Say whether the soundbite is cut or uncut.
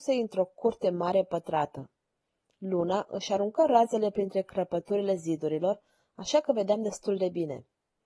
uncut